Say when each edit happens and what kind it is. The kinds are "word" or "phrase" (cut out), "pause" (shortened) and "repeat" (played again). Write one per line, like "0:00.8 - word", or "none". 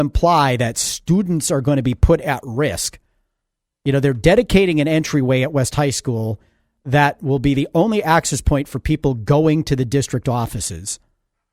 none